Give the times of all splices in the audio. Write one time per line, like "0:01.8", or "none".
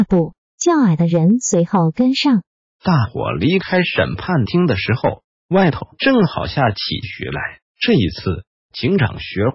0:07.7